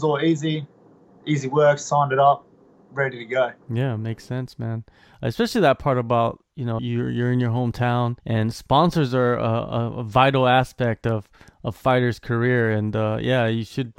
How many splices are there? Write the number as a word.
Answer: three